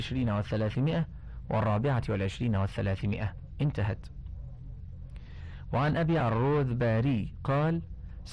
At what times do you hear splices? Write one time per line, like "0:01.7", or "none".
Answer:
0:06.2